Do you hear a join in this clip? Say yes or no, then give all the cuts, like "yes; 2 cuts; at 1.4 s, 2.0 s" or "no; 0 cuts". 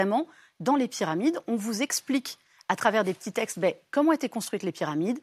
no; 0 cuts